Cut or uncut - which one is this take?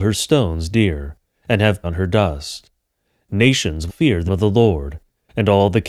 cut